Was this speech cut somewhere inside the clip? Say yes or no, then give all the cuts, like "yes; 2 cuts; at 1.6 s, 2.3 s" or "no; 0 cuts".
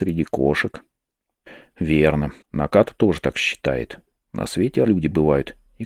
yes; 3 cuts; at 2.4 s, 4.2 s, 4.9 s